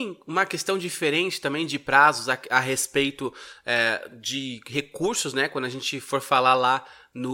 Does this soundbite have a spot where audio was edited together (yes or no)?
no